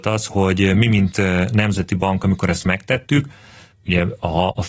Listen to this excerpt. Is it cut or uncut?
uncut